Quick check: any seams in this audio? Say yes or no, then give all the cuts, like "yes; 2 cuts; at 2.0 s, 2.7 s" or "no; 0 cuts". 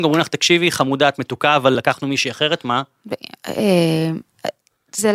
no; 0 cuts